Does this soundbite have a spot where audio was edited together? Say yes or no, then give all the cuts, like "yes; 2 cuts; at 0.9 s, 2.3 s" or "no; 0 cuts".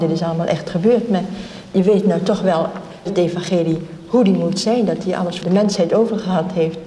yes; 3 cuts; at 1.7 s, 3.1 s, 5.4 s